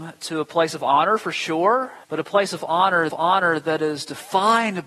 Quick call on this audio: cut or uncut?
cut